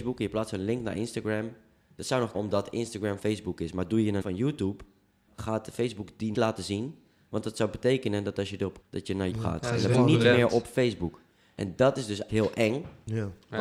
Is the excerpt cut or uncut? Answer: cut